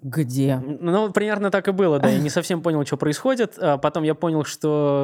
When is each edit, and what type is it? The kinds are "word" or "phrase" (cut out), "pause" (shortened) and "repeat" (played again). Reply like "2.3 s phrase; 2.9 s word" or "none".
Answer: none